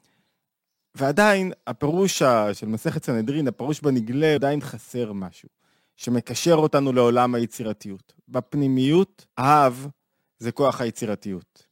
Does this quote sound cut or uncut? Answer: cut